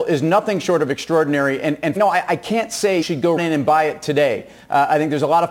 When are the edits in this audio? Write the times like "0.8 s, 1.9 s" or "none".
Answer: 2.0 s, 3.0 s, 3.4 s